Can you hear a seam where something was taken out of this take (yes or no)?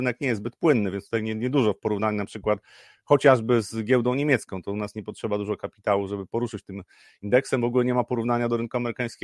no